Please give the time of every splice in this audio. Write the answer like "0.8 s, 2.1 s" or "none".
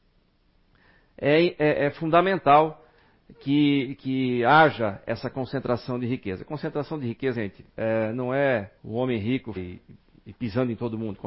7.3 s, 7.7 s, 8.8 s, 9.6 s